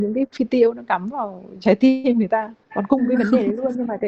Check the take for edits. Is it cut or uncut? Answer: cut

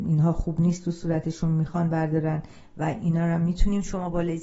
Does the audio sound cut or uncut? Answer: uncut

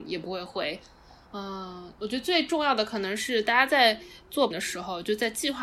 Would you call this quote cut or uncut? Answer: cut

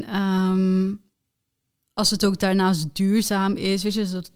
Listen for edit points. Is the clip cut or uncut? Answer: uncut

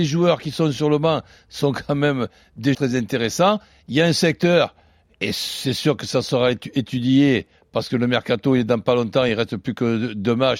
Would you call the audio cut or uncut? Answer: cut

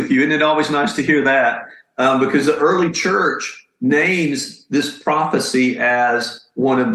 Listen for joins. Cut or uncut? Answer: uncut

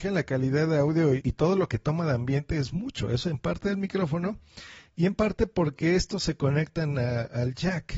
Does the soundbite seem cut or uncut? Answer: cut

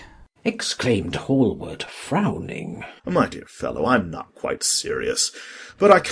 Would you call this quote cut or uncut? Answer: cut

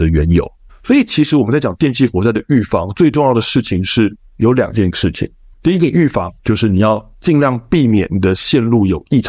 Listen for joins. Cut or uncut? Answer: cut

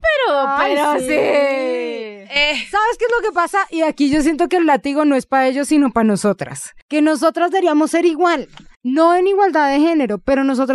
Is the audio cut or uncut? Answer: cut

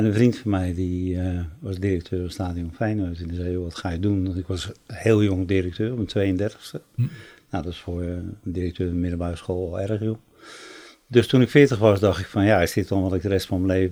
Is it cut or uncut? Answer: uncut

